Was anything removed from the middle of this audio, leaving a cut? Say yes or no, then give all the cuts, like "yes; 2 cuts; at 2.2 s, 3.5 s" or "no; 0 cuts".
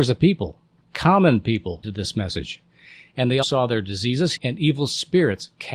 yes; 3 cuts; at 1.8 s, 3.4 s, 4.4 s